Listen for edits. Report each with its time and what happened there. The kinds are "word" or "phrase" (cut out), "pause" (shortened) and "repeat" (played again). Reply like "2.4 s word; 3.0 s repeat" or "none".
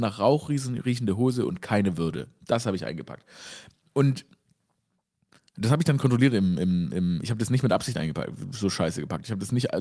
none